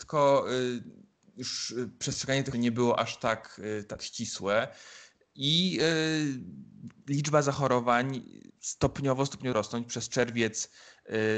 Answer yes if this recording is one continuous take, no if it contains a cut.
no